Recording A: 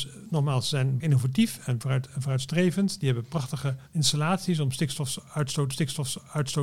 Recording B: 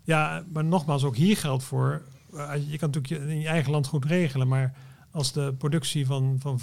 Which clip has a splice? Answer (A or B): A